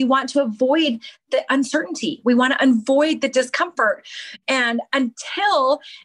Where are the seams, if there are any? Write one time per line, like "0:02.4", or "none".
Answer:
none